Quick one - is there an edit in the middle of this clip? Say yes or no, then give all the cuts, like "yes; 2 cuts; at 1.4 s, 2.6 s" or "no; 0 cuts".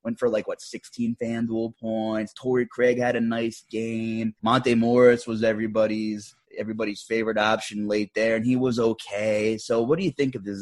yes; 2 cuts; at 4.4 s, 6.4 s